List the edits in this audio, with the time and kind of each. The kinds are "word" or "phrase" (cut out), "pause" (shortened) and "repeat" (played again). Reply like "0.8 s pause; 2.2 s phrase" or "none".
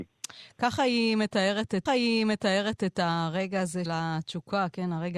1.9 s repeat; 3.9 s word

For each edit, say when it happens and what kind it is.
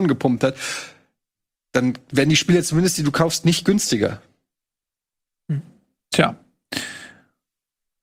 none

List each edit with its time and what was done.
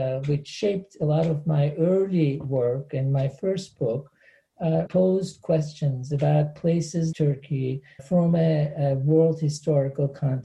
4.9 s word; 7.1 s word; 8.0 s word

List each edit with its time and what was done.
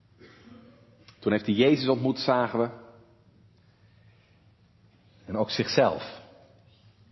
none

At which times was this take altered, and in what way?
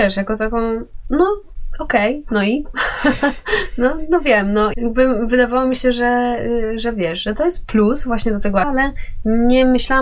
4.7 s word; 8.6 s word

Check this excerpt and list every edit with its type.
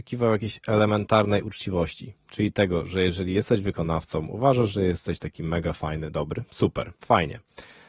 7.0 s pause

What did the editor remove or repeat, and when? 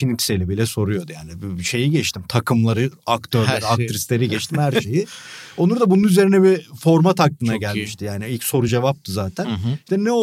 none

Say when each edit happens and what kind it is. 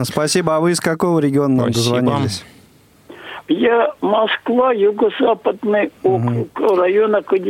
4.0 s word

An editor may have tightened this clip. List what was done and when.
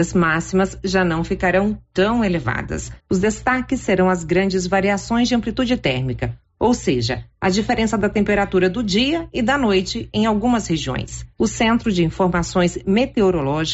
3.0 s pause; 11.3 s pause

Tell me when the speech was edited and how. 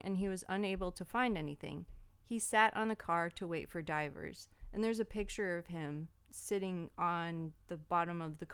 6.2 s pause

